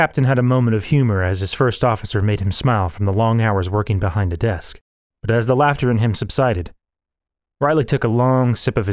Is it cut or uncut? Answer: uncut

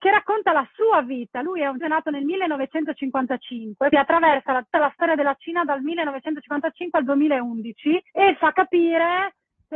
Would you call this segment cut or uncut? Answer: cut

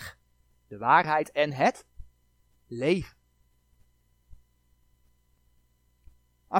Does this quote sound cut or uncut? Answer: uncut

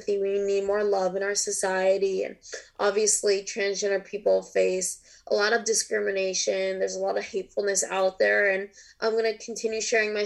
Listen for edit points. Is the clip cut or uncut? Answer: uncut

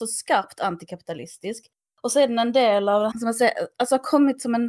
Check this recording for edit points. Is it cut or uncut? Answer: cut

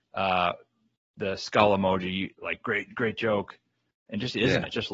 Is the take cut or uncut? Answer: cut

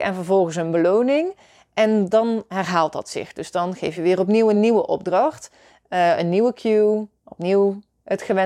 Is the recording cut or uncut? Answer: uncut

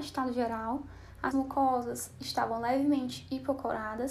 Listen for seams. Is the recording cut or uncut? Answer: cut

